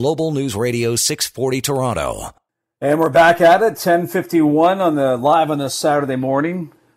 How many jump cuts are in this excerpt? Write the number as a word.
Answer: zero